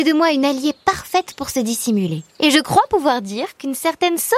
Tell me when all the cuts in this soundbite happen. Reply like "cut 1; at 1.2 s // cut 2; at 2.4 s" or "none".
cut 1; at 2.3 s